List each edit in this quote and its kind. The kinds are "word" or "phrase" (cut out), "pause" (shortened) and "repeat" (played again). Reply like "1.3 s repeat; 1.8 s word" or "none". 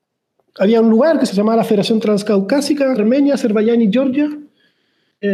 1.3 s phrase; 3.0 s word